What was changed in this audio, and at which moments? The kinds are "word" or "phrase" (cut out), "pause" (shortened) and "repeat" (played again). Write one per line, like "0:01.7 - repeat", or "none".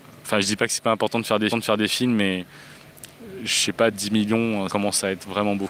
0:01.5 - repeat
0:03.9 - phrase
0:04.7 - word